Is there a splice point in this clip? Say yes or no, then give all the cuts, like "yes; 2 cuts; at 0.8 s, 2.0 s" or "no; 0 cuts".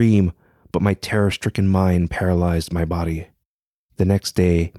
no; 0 cuts